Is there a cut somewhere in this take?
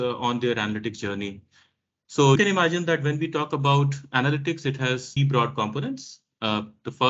yes; 2 cuts; at 2.4 s, 5.2 s

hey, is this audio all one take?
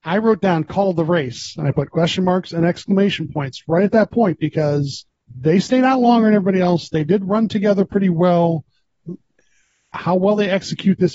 no; 1 cut; at 5.1 s

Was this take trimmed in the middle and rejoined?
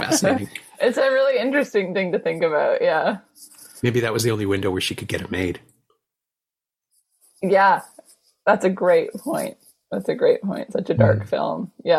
no; 0 cuts

